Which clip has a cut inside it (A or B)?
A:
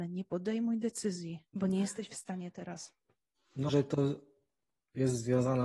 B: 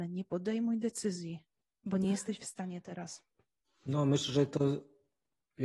A